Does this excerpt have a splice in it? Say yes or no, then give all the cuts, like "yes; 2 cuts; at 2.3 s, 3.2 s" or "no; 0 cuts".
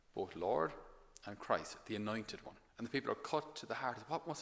yes; 1 cut; at 2.7 s